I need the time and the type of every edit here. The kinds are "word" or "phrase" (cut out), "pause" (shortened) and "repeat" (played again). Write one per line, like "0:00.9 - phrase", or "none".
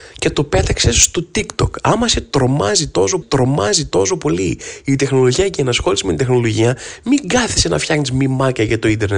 0:03.2 - repeat